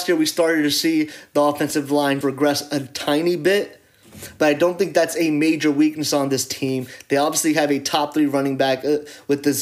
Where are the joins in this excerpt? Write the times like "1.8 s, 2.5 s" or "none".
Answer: 2.2 s